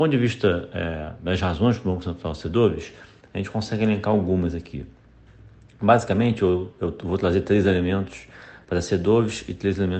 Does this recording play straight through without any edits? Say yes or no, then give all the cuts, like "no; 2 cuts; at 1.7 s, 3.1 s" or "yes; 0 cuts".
yes; 0 cuts